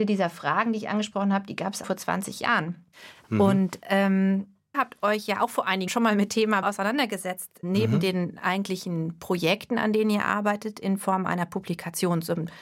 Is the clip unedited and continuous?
no; 6 cuts; at 1.8 s, 4.7 s, 5.9 s, 6.3 s, 6.6 s, 7.6 s

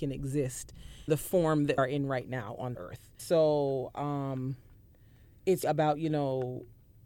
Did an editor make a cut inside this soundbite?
yes; 5 cuts; at 1.1 s, 1.8 s, 2.7 s, 3.2 s, 5.6 s

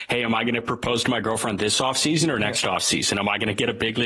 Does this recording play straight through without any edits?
yes; 0 cuts

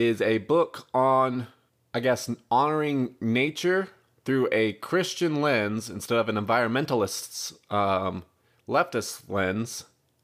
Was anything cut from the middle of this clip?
no; 0 cuts

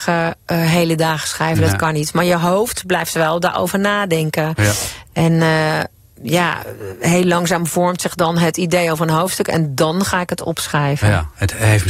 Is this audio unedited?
yes; 0 cuts

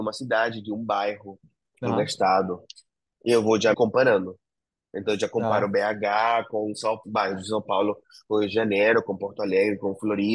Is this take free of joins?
no; 2 cuts; at 3.7 s, 7.0 s

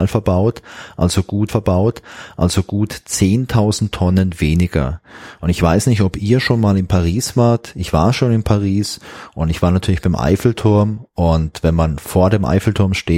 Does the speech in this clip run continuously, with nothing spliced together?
no; 1 cut; at 1.5 s

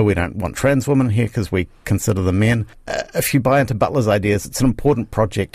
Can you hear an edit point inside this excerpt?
yes; 1 cut; at 2.7 s

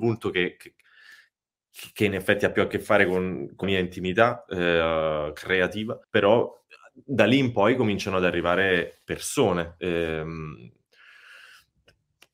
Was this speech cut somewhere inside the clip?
yes; 2 cuts; at 3.6 s, 6.0 s

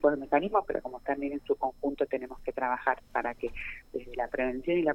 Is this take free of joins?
no; 1 cut; at 1.0 s

